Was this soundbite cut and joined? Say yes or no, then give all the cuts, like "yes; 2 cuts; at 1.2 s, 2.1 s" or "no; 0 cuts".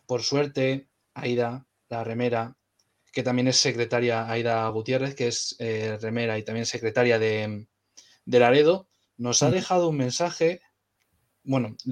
no; 0 cuts